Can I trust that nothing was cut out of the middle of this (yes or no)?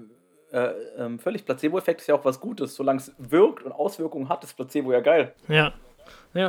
no